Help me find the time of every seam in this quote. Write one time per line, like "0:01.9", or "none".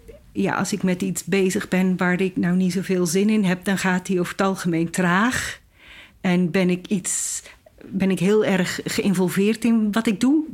none

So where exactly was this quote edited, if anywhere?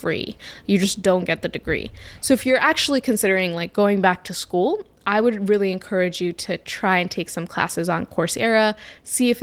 none

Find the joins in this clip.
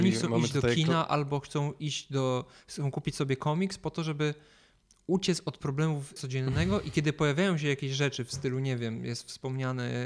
0:06.2

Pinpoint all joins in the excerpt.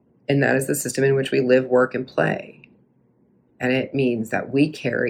none

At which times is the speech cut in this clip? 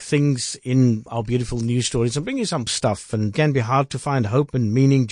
0:01.1
0:02.7
0:03.3

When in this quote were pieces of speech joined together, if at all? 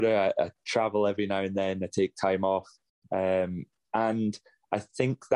none

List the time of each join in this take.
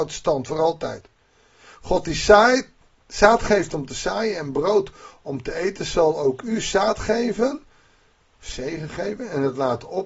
none

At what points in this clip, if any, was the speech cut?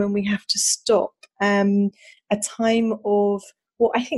none

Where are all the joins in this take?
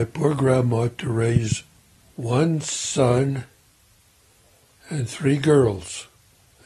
none

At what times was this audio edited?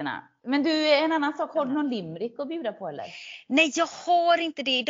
none

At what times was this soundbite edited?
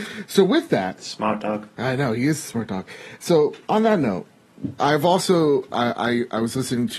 0:03.6

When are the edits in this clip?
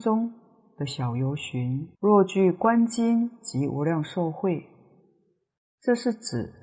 0:01.9

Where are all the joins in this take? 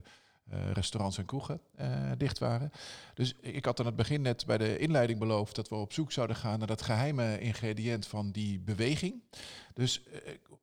none

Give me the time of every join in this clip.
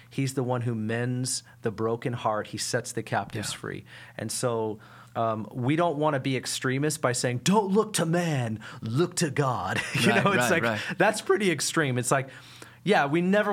0:05.1

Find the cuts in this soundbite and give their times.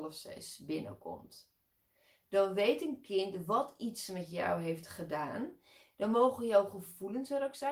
none

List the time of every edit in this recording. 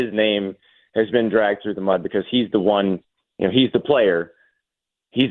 none

